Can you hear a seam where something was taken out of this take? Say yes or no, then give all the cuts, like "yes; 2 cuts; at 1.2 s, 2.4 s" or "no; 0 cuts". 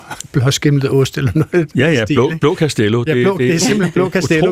no; 0 cuts